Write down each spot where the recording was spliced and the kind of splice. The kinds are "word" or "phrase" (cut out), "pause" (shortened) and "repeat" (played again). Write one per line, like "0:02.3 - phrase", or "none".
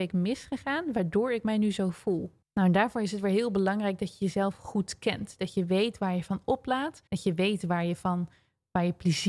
0:02.4 - pause
0:07.1 - pause